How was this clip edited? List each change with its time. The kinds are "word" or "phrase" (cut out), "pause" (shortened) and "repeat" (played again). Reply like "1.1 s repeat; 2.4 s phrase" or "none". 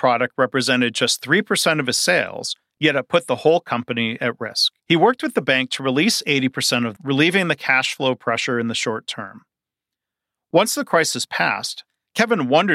4.8 s pause; 7.0 s phrase